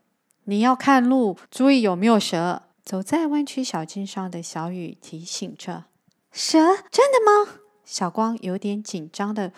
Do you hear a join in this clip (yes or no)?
yes